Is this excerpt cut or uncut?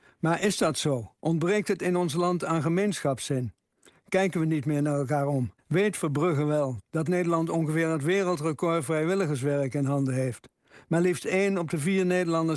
cut